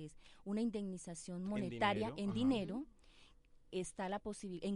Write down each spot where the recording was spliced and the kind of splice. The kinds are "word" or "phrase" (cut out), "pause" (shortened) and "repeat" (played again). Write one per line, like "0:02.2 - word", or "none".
0:03.7 - word